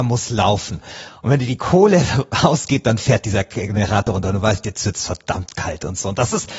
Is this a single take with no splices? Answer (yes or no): yes